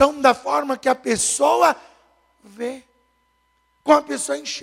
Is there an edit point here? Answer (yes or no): no